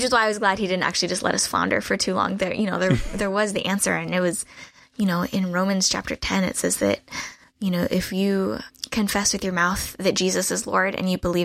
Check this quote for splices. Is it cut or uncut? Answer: uncut